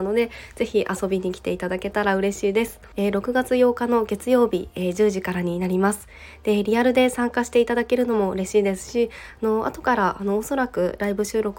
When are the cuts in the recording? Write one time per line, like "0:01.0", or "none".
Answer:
0:02.9